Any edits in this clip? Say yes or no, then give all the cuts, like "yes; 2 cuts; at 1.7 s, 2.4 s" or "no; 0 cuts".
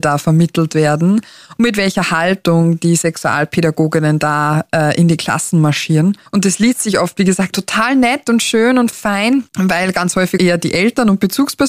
yes; 5 cuts; at 6.3 s, 7.5 s, 8.9 s, 9.5 s, 10.4 s